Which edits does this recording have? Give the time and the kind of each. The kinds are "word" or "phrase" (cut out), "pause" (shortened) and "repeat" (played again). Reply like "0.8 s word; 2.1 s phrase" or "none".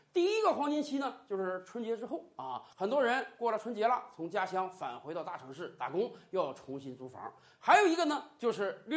2.7 s pause